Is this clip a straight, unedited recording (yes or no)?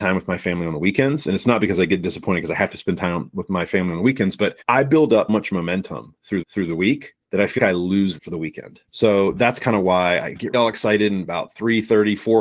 no